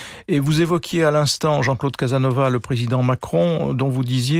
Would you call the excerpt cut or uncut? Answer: uncut